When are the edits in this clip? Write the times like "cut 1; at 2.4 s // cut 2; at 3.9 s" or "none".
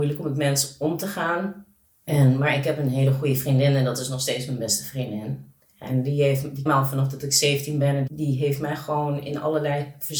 cut 1; at 6.7 s // cut 2; at 8.1 s